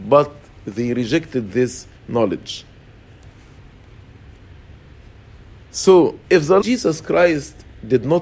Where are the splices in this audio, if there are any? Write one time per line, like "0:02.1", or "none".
0:02.0
0:06.2
0:06.6